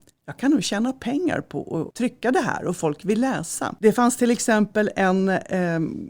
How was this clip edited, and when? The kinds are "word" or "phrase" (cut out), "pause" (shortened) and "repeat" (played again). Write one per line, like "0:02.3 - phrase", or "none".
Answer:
none